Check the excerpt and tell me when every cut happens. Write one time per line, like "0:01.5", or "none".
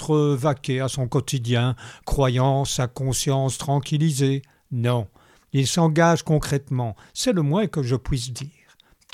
none